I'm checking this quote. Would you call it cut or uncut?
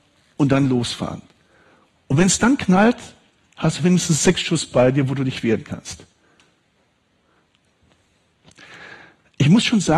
uncut